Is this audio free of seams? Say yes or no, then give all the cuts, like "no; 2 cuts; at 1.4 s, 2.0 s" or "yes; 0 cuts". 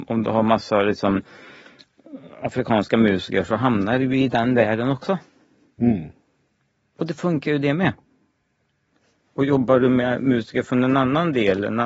yes; 0 cuts